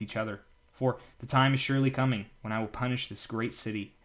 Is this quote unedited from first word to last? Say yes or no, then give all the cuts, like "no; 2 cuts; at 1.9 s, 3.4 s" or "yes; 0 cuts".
yes; 0 cuts